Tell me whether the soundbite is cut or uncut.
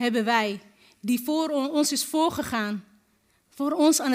uncut